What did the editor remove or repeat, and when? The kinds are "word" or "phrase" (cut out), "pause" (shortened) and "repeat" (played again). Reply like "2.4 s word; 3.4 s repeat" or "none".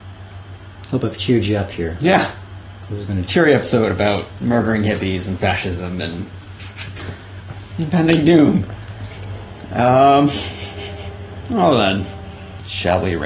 3.3 s word